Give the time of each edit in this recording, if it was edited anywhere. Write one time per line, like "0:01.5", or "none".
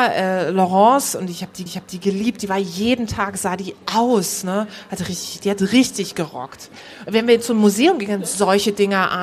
0:01.7